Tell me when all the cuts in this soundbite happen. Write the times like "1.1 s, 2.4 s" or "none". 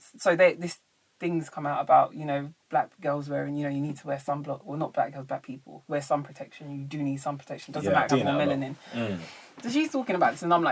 2.6 s, 5.9 s, 8.1 s

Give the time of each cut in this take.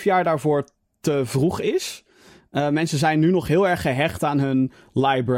none

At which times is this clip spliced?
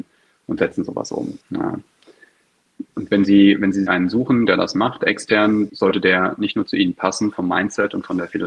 1.4 s, 3.9 s, 5.7 s

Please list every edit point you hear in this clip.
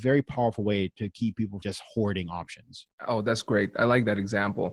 1.6 s, 3.0 s

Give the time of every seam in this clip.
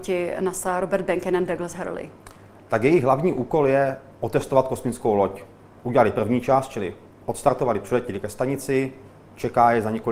none

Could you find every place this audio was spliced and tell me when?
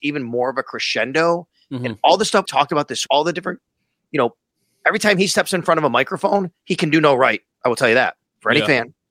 2.5 s, 3.1 s

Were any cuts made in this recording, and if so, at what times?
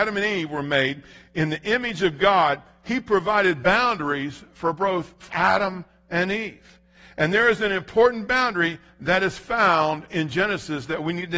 5.3 s

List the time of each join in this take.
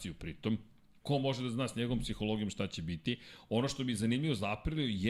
1.0 s

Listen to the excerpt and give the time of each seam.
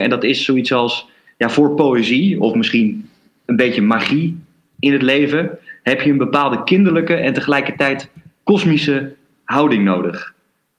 none

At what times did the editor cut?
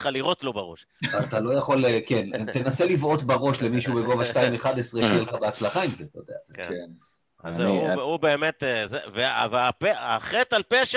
8.9 s

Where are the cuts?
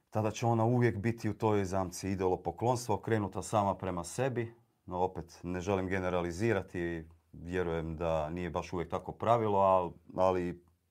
none

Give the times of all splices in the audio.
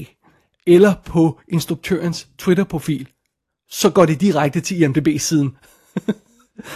none

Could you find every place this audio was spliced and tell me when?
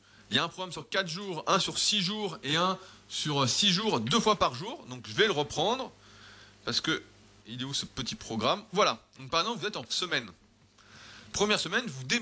7.4 s, 8.7 s, 9.9 s

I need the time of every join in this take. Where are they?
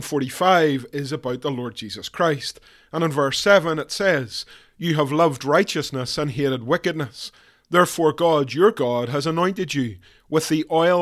none

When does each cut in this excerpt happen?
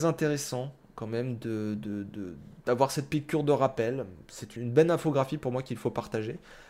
4.6 s

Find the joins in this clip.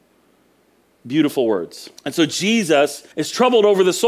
2.0 s, 3.1 s

